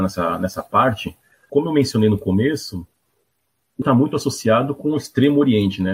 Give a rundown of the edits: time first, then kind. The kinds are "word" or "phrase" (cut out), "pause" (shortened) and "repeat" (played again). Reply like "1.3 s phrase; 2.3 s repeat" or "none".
1.5 s word; 3.8 s word